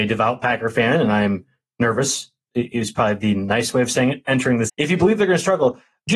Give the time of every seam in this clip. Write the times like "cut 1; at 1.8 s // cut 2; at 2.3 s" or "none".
cut 1; at 4.7 s